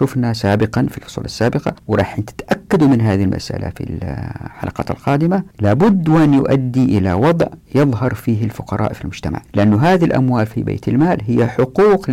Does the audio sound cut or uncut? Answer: cut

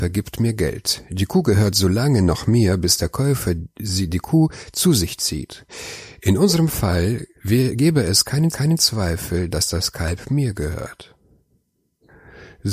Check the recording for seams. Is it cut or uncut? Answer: cut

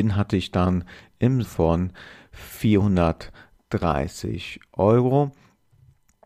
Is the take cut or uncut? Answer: cut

